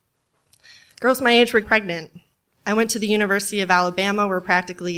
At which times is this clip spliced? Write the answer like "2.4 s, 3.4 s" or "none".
1.6 s